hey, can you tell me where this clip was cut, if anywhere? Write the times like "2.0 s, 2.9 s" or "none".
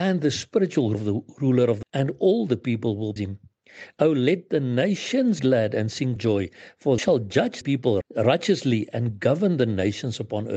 0.9 s, 1.8 s, 3.2 s, 5.4 s, 6.2 s, 7.0 s, 7.6 s, 8.0 s